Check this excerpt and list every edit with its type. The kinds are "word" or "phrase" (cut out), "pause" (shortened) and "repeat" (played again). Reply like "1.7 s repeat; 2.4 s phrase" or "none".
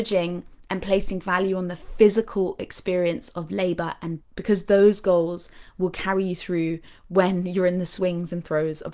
4.2 s word